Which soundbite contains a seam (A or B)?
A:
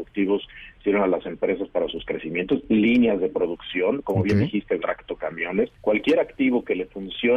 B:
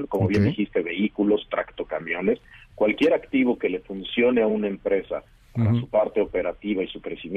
A